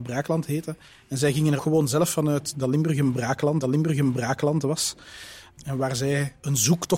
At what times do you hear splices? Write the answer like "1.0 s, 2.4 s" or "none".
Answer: 1.6 s, 3.6 s